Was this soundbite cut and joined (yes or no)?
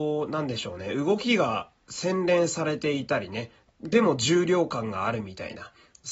no